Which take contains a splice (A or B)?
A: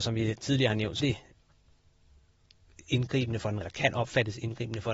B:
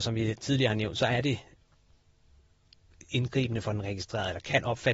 A